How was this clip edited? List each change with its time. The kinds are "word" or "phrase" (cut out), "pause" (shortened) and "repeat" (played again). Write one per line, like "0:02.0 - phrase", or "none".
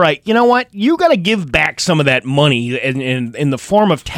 none

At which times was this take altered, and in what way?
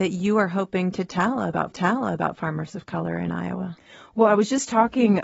0:01.7 - repeat

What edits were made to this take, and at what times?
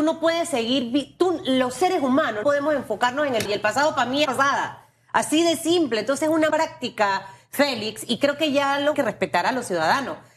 0:02.4 - word
0:03.4 - word
0:04.2 - phrase
0:06.5 - word
0:08.9 - phrase

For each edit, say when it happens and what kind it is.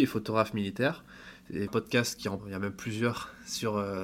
0:01.7 - phrase
0:02.4 - word

